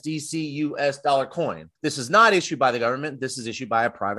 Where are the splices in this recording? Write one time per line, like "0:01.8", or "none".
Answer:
0:01.8